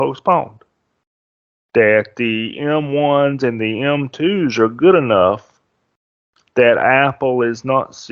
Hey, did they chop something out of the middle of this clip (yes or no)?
no